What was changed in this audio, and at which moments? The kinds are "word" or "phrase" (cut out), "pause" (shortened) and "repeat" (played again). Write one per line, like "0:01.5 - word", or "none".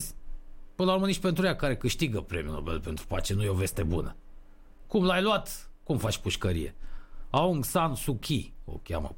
none